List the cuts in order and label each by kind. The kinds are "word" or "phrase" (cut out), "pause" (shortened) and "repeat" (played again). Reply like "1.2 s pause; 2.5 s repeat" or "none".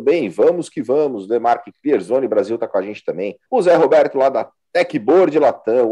3.4 s pause